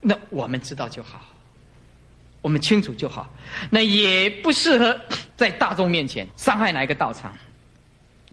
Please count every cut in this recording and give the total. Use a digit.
2